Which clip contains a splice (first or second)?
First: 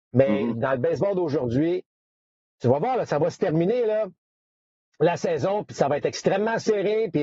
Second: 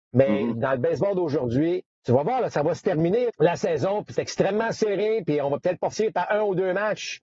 second